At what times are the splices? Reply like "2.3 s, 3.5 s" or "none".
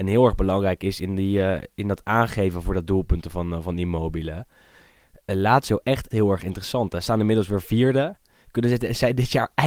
6.1 s